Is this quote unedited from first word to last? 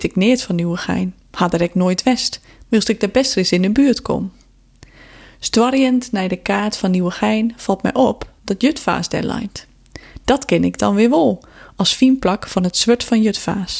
yes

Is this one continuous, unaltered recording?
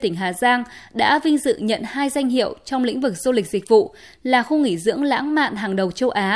yes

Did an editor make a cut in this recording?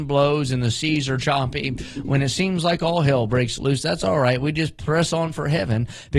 no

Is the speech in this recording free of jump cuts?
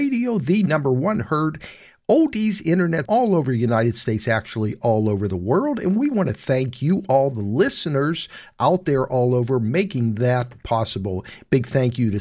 no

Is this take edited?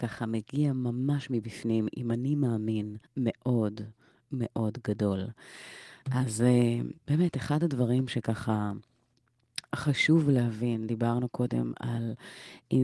yes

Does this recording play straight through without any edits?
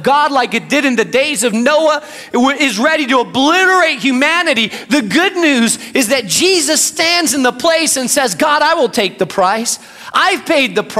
yes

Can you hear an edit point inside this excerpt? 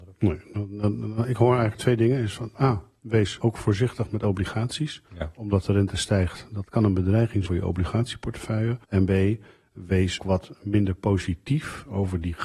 yes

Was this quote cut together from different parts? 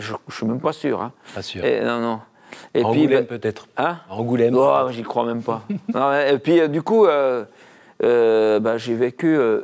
no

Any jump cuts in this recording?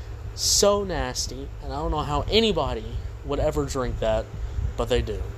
no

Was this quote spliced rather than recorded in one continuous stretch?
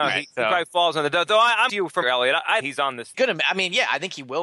yes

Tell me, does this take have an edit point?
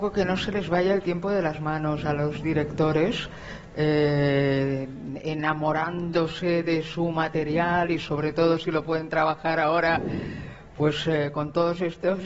no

